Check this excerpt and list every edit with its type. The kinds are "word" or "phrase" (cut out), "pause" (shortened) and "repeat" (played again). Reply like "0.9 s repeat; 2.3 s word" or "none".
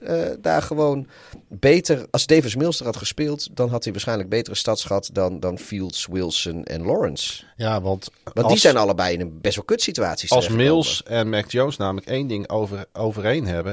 2.1 s pause